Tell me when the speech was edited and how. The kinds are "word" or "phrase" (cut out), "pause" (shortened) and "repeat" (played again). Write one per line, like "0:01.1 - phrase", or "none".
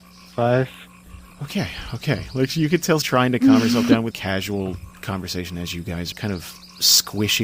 0:01.3 - pause
0:03.0 - word
0:04.1 - word
0:06.1 - word